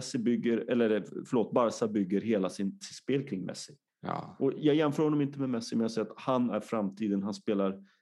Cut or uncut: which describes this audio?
cut